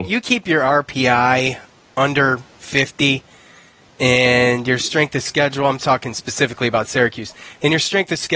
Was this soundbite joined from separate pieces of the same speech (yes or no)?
no